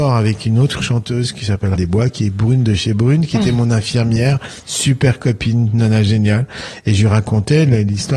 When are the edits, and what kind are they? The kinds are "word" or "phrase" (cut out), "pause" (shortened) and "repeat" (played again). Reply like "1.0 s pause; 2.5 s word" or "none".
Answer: 1.8 s word